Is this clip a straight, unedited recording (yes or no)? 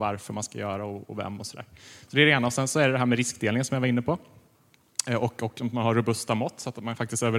yes